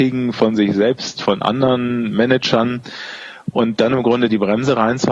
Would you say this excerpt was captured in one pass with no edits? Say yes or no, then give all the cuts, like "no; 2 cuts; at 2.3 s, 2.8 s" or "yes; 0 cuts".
yes; 0 cuts